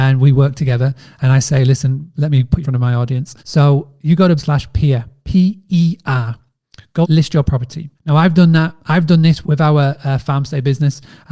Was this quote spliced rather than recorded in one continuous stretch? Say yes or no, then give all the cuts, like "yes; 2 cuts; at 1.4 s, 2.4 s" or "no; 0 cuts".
yes; 8 cuts; at 2.1 s, 2.6 s, 3.4 s, 4.4 s, 5.6 s, 7.0 s, 7.9 s, 9.4 s